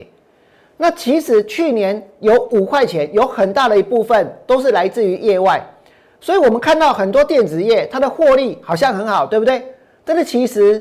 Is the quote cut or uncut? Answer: uncut